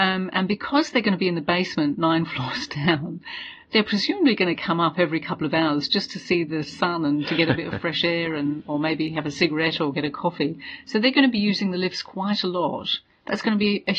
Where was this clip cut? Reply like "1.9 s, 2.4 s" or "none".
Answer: none

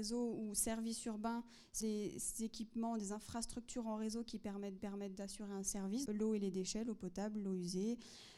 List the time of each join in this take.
1.8 s, 4.8 s, 6.1 s

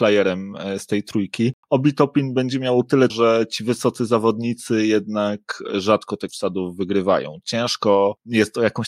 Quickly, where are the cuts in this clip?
1.6 s, 3.1 s, 6.3 s

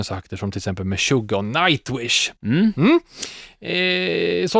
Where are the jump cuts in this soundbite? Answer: 2.4 s

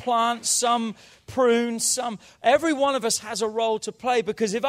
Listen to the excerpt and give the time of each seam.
none

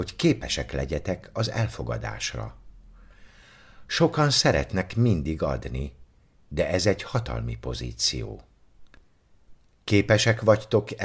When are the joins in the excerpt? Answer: none

